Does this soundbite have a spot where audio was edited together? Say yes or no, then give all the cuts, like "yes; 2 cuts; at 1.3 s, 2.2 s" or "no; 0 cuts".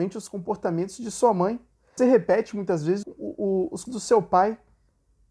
yes; 3 cuts; at 2.0 s, 3.0 s, 3.9 s